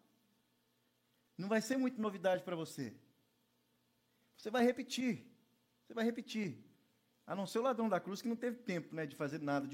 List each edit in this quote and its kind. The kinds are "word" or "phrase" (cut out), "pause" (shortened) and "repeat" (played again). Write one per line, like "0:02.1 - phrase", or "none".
none